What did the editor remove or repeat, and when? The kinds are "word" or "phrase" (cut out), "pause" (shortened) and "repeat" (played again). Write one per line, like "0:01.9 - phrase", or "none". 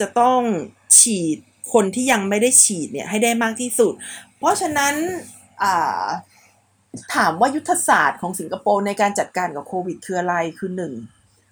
0:07.0 - pause